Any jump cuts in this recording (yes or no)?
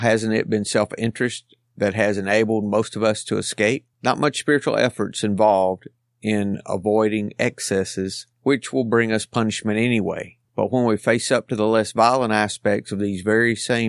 yes